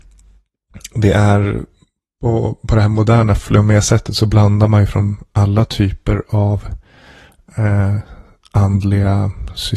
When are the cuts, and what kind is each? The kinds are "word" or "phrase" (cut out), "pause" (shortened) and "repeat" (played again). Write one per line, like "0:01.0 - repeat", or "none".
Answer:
none